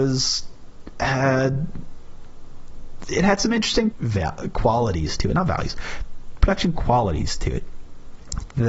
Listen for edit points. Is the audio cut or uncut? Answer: cut